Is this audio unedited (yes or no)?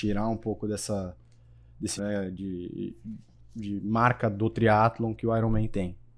no